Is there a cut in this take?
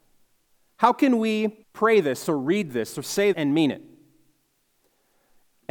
yes; 2 cuts; at 1.6 s, 3.3 s

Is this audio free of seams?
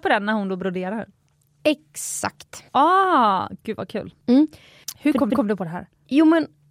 no; 1 cut; at 5.3 s

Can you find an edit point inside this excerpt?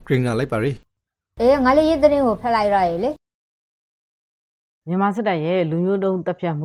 no; 0 cuts

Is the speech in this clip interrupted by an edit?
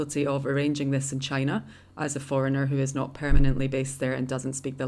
no; 0 cuts

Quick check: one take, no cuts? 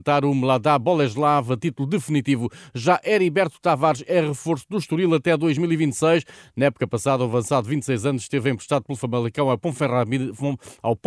yes; 0 cuts

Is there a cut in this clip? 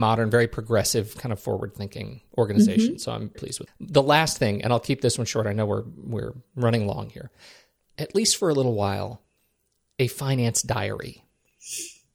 yes; 3 cuts; at 3.3 s, 3.7 s, 7.9 s

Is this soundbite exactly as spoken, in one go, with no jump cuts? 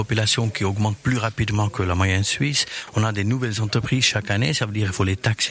yes; 0 cuts

